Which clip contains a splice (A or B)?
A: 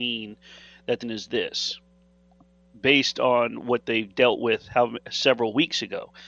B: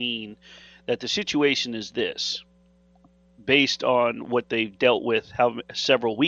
A